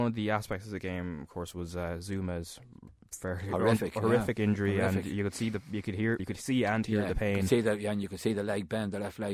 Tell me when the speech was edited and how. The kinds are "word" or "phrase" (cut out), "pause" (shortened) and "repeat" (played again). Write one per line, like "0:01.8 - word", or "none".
0:06.2 - word